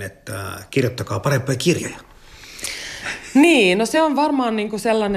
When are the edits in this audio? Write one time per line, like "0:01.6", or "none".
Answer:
none